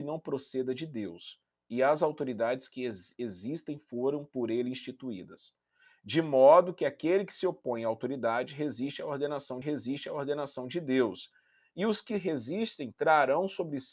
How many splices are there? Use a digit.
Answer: 1